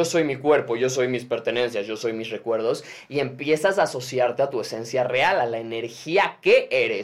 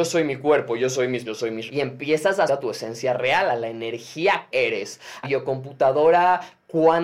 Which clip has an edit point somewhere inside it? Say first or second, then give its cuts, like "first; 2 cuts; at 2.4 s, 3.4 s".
second; 5 cuts; at 1.2 s, 1.7 s, 2.5 s, 4.5 s, 5.2 s